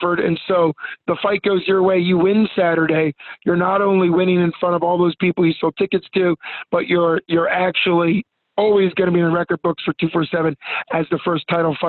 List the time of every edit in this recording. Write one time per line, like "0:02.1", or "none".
none